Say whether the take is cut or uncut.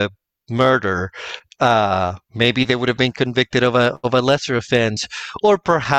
cut